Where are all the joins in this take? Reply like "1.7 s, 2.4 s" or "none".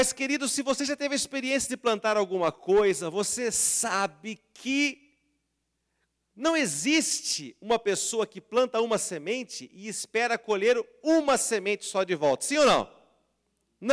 none